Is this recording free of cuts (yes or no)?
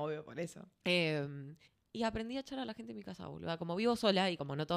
no